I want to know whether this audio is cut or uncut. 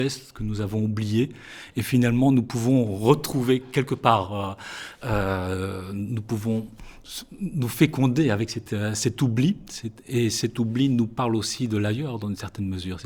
uncut